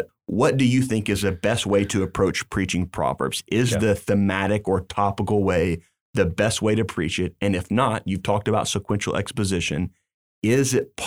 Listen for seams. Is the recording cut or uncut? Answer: uncut